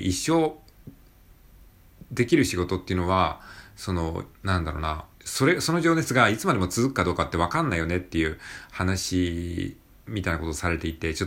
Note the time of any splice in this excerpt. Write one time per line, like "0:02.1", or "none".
0:04.3
0:05.1
0:09.9